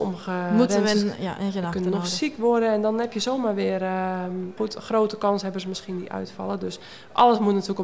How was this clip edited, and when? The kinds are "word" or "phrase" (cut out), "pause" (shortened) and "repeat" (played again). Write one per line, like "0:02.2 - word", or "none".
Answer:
0:04.6 - word